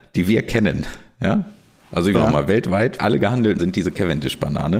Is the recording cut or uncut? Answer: cut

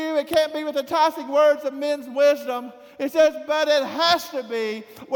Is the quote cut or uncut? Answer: uncut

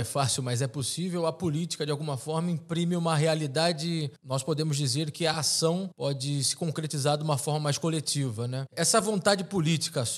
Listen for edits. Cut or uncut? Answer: uncut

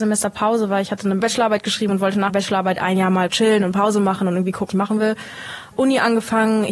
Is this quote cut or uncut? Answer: cut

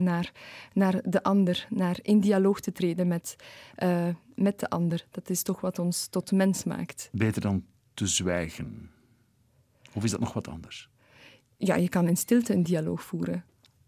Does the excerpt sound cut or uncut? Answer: uncut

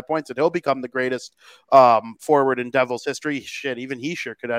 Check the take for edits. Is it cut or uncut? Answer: uncut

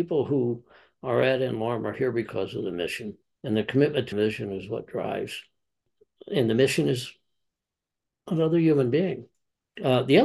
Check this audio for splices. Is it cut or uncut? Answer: cut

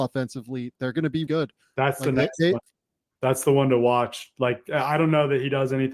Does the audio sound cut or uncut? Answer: cut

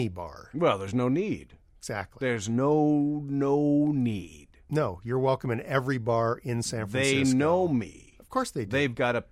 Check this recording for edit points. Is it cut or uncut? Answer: uncut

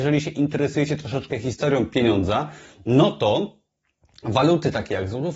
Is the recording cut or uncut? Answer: uncut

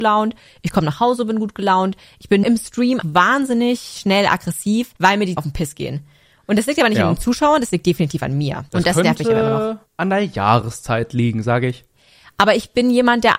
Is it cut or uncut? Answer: cut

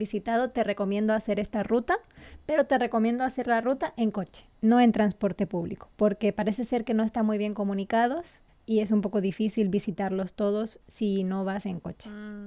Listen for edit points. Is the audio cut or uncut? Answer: cut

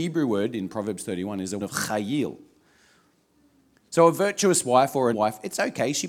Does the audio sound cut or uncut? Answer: cut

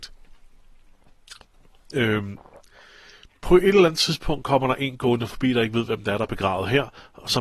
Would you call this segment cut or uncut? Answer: uncut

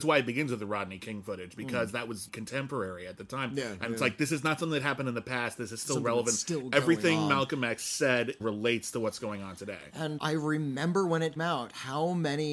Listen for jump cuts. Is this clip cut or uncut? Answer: cut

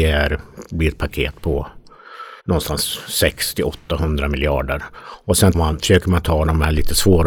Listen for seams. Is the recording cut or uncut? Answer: cut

